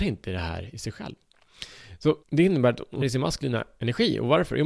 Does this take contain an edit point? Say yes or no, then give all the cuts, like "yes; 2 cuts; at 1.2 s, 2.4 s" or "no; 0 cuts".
yes; 2 cuts; at 2.2 s, 3.0 s